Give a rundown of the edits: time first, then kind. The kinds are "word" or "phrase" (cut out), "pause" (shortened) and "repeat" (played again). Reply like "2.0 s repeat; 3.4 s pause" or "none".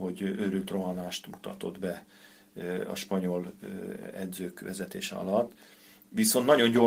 none